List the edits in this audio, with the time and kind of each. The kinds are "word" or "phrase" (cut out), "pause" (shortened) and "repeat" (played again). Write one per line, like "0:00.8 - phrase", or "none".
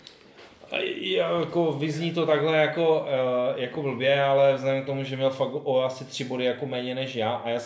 none